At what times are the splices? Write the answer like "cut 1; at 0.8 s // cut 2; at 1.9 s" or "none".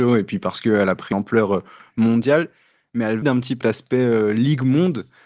cut 1; at 1.1 s // cut 2; at 3.2 s // cut 3; at 3.6 s